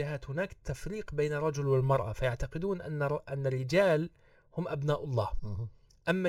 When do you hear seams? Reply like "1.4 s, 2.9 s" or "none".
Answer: none